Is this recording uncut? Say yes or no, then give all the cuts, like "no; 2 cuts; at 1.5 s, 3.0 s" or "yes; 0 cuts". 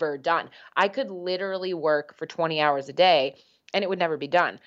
yes; 0 cuts